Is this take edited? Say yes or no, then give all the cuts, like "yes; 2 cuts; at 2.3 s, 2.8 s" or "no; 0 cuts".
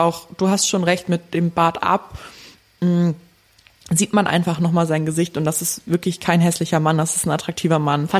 no; 0 cuts